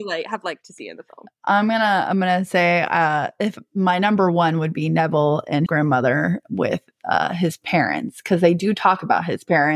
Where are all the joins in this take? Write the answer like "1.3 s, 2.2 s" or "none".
5.7 s